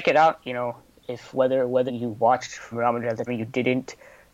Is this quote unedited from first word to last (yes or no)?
no